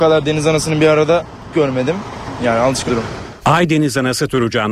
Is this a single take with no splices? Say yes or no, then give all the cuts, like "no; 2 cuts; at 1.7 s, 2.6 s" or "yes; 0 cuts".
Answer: no; 2 cuts; at 1.5 s, 2.9 s